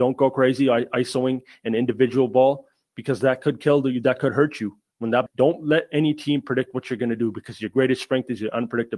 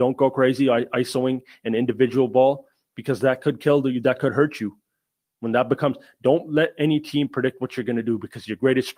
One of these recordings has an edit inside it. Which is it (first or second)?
first